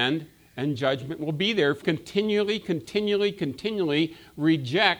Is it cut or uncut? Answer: cut